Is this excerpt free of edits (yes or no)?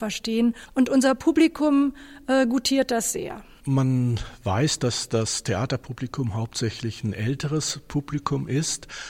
yes